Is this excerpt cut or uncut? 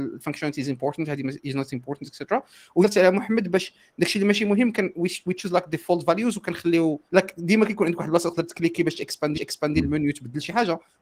cut